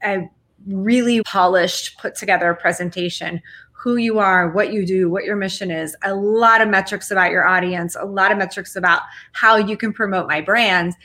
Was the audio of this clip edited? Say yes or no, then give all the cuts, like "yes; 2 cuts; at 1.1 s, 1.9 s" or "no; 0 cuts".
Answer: yes; 1 cut; at 1.2 s